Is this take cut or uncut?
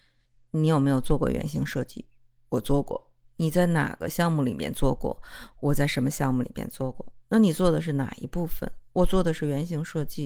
uncut